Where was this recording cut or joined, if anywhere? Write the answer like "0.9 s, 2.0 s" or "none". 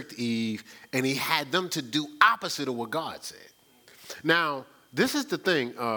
none